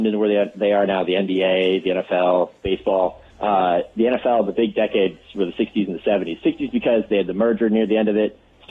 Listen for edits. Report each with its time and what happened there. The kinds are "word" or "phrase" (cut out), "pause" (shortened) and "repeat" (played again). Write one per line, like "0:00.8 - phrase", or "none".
0:03.3 - pause